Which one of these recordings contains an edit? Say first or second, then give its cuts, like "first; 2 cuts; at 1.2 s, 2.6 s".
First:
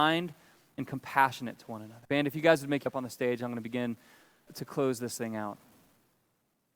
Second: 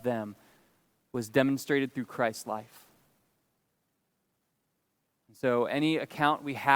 first; 3 cuts; at 2.0 s, 2.9 s, 4.5 s